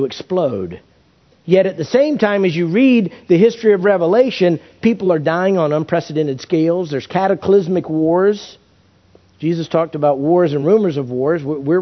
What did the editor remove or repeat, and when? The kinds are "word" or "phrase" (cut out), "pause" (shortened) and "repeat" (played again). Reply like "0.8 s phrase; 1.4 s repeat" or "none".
none